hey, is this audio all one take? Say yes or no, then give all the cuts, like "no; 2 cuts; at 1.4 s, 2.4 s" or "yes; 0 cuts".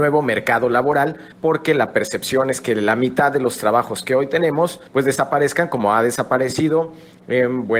no; 2 cuts; at 1.3 s, 4.9 s